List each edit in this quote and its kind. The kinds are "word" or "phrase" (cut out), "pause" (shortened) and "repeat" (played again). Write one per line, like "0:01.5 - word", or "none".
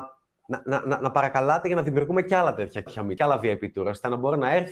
0:02.9 - word
0:03.2 - word